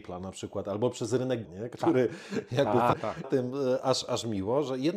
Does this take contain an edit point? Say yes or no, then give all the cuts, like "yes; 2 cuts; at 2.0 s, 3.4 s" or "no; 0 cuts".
yes; 3 cuts; at 1.4 s, 2.9 s, 3.2 s